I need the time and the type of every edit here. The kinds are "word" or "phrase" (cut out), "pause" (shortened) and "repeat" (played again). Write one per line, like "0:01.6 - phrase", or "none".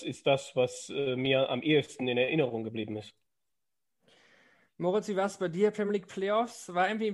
none